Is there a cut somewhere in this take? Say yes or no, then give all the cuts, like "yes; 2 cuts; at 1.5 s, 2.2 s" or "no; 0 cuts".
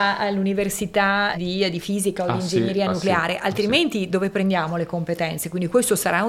yes; 1 cut; at 1.3 s